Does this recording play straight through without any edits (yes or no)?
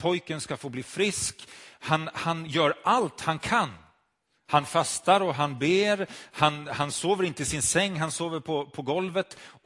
yes